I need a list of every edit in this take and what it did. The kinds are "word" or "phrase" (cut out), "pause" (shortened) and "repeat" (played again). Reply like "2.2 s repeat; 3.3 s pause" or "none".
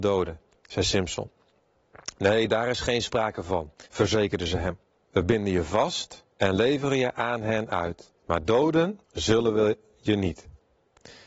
3.9 s pause; 5.0 s pause; 6.3 s pause; 8.2 s pause; 9.0 s pause